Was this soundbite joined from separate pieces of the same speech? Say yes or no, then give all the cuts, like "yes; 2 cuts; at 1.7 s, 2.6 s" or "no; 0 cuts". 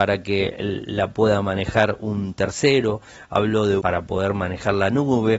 yes; 1 cut; at 3.8 s